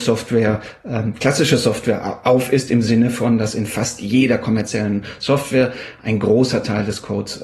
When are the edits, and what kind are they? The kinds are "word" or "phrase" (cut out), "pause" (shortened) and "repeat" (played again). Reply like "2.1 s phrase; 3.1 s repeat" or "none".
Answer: none

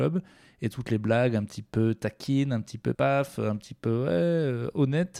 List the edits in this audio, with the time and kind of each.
2.9 s word

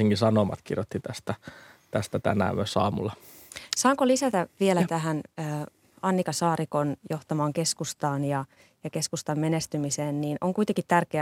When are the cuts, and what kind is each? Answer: none

